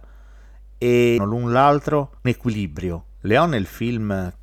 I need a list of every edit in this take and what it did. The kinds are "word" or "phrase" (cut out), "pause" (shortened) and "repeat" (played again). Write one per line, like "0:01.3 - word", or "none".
0:01.2 - phrase
0:02.2 - phrase